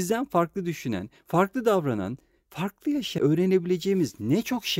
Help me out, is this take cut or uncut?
cut